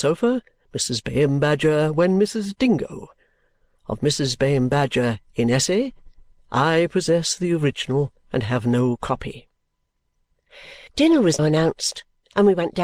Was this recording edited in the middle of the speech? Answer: yes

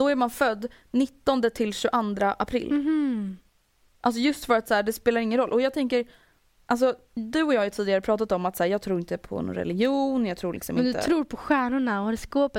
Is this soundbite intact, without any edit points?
yes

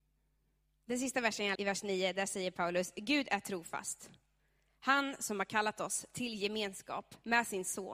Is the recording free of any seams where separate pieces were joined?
no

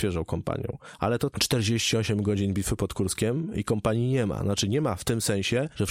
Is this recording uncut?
no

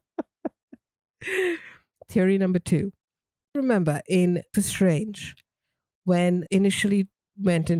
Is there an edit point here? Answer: yes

